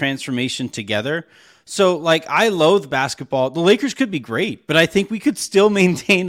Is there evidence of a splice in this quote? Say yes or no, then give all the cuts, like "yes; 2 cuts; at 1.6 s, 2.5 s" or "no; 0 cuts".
no; 0 cuts